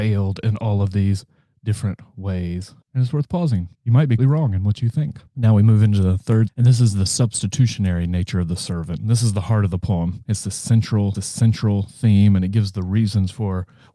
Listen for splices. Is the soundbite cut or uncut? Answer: cut